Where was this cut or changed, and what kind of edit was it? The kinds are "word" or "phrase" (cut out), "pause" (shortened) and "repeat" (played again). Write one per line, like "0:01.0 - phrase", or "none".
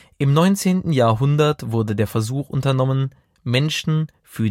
none